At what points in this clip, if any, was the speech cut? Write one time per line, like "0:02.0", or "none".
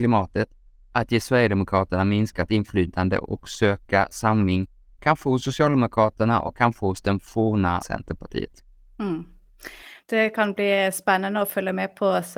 0:07.8